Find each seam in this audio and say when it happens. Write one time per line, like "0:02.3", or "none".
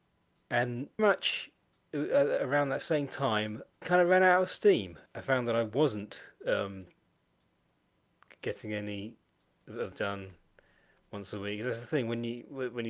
0:01.0
0:03.8
0:05.1
0:09.9